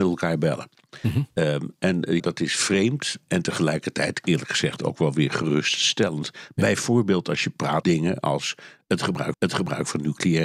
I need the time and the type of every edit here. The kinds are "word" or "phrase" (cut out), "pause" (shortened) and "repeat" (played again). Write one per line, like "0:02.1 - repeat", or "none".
0:02.2 - word
0:07.8 - word
0:09.3 - repeat